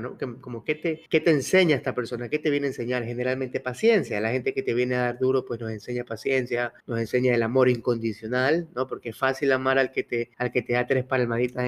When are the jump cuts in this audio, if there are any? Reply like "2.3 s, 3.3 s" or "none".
1.1 s, 6.8 s, 10.3 s